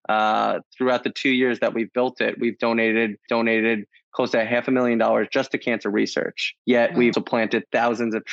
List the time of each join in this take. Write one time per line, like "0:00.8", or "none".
0:03.3
0:06.6
0:07.1